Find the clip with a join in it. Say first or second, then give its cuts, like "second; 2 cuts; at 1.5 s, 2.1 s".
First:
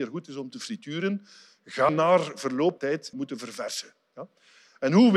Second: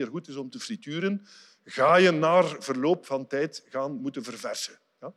first; 3 cuts; at 1.9 s, 2.8 s, 3.1 s